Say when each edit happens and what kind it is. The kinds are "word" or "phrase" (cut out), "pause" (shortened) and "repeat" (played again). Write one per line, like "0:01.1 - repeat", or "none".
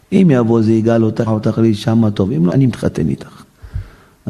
0:01.3 - word
0:02.5 - word